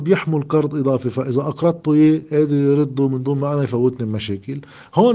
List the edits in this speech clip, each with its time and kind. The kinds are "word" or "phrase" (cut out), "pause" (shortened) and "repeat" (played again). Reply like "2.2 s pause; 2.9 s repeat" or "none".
none